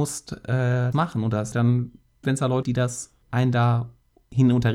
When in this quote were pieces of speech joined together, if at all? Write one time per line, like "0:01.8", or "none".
0:00.9
0:01.5
0:02.2
0:02.6
0:03.2